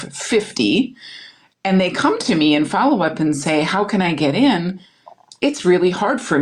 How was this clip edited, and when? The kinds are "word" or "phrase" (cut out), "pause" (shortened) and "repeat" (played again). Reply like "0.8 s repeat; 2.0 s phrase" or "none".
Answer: none